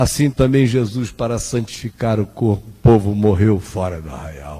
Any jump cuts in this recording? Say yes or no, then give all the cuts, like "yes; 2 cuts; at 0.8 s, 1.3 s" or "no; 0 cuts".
no; 0 cuts